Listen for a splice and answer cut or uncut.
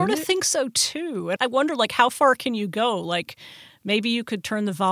cut